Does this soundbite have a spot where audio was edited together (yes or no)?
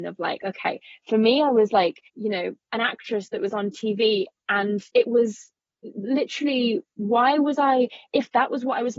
yes